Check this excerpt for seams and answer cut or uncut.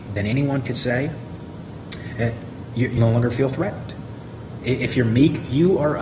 cut